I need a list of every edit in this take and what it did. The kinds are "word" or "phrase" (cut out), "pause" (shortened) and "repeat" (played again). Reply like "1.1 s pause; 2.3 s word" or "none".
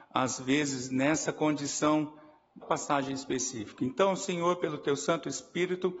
2.6 s phrase